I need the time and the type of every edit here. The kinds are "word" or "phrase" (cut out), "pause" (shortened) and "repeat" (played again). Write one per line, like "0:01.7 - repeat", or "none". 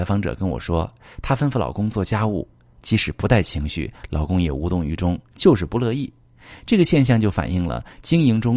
none

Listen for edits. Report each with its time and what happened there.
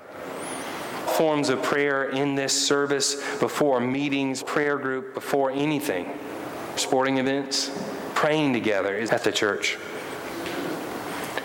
0:01.1 - word
0:04.4 - word
0:06.8 - word
0:09.1 - word

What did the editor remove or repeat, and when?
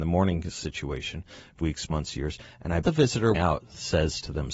0:01.6 - word
0:02.8 - word
0:03.3 - word

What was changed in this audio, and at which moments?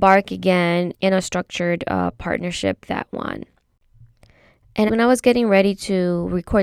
0:00.9 - word
0:02.8 - word
0:04.9 - phrase

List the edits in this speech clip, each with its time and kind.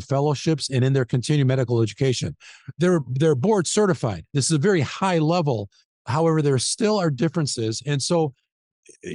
none

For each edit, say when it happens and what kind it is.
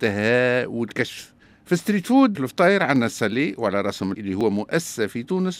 0:02.3 - word
0:04.1 - word

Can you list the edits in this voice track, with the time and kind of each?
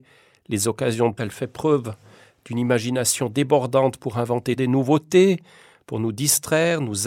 0:01.2 - word
0:04.6 - word

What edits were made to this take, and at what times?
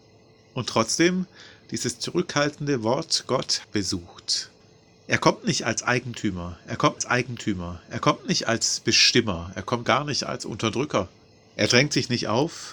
0:03.6 - phrase
0:07.0 - repeat
0:09.8 - word

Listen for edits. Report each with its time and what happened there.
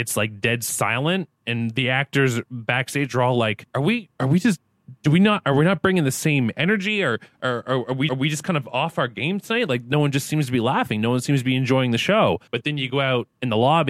0:03.7 - pause
0:08.1 - repeat
0:12.5 - pause

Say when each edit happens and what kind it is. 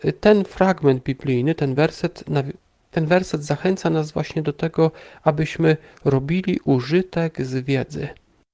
none

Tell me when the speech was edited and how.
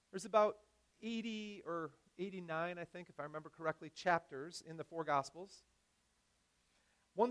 none

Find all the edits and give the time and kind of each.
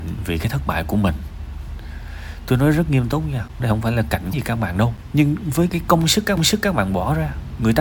0:03.6 - word
0:04.3 - word
0:05.7 - word
0:06.4 - repeat

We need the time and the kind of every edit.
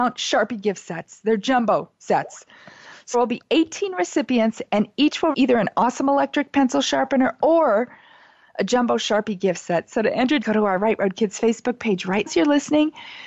0:03.1 - word
0:05.3 - word
0:10.4 - word
0:12.3 - word

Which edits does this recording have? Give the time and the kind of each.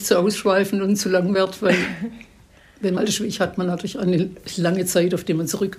0:03.0 - word

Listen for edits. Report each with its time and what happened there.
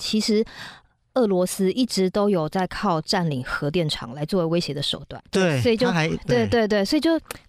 0:05.3 - pause

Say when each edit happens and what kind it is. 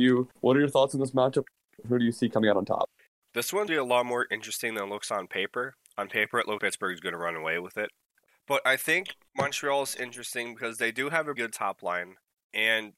0:03.7 - word
0:06.6 - word
0:11.4 - word

